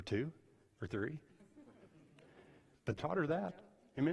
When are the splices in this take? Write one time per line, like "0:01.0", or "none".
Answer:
0:03.0